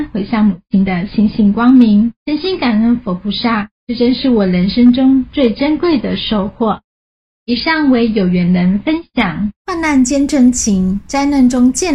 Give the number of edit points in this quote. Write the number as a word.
two